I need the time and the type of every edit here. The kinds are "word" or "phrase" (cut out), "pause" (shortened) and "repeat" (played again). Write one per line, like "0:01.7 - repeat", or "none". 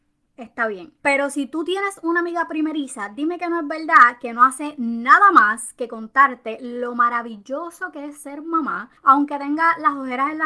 0:01.0 - pause
0:09.0 - pause